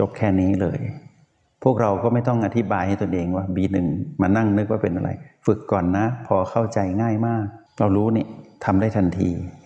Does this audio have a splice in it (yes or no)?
yes